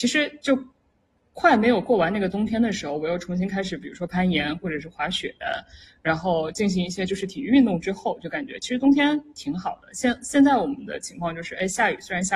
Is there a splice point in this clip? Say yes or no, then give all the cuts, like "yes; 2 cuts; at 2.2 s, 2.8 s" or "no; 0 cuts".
no; 0 cuts